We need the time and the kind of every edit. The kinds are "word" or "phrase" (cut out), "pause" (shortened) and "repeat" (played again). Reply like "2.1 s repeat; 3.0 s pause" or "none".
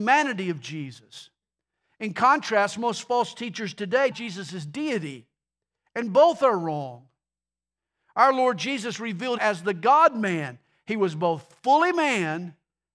4.1 s word; 9.4 s word